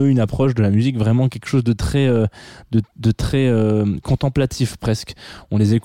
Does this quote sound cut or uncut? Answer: uncut